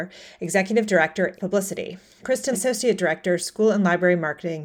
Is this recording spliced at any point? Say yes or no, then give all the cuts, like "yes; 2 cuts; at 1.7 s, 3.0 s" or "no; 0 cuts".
yes; 2 cuts; at 1.3 s, 2.5 s